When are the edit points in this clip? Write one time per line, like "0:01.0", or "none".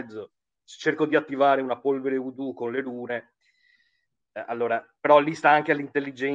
none